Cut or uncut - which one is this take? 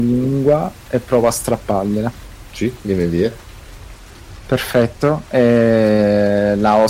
uncut